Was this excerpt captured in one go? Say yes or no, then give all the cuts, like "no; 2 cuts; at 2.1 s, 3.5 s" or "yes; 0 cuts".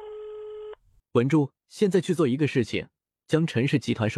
no; 1 cut; at 1.6 s